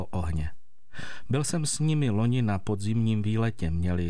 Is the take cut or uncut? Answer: uncut